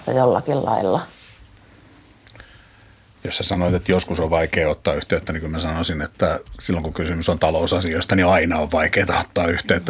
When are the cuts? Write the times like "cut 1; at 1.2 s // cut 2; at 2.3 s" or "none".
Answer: none